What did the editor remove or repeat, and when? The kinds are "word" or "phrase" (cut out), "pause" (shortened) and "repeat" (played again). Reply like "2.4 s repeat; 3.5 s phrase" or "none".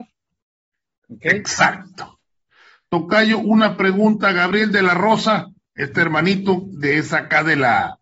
5.6 s word